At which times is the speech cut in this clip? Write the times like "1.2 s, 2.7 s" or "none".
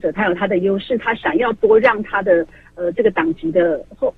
none

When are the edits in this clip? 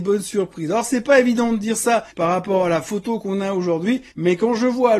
2.1 s, 4.1 s

